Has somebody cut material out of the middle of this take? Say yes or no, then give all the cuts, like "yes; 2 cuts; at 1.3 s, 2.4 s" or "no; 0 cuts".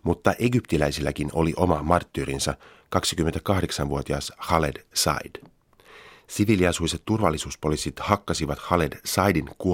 no; 0 cuts